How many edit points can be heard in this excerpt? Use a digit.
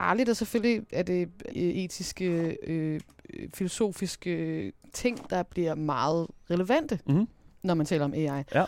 2